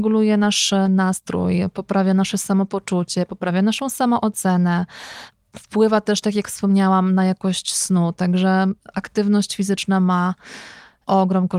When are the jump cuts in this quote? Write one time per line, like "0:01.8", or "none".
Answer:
none